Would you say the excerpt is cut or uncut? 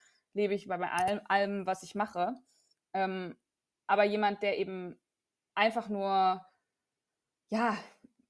uncut